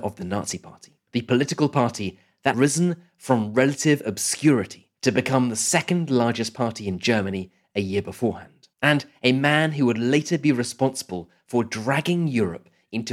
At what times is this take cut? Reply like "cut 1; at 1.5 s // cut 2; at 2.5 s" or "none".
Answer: cut 1; at 1.0 s // cut 2; at 2.5 s // cut 3; at 5.0 s // cut 4; at 8.7 s